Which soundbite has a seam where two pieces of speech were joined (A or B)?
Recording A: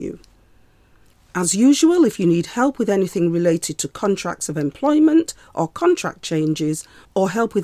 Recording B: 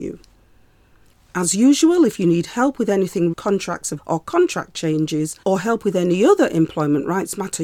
B